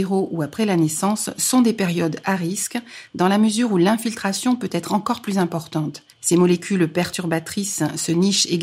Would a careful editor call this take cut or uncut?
cut